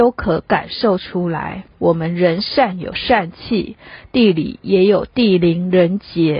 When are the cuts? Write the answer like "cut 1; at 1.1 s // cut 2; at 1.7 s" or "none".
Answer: cut 1; at 1.7 s